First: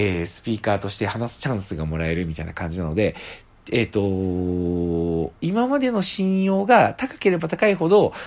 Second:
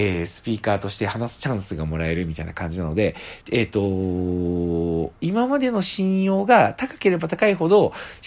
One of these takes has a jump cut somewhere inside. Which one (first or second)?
second